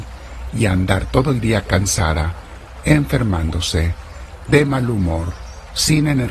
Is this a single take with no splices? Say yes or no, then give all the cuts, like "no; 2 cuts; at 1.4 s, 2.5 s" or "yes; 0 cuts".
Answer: yes; 0 cuts